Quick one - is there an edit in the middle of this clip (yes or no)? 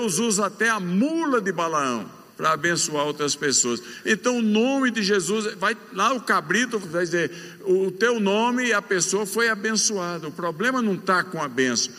yes